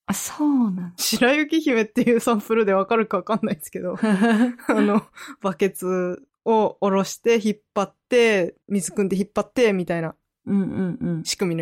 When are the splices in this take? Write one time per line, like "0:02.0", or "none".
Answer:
0:08.6